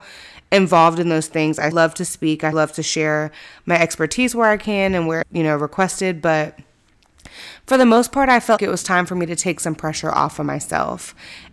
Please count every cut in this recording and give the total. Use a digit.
4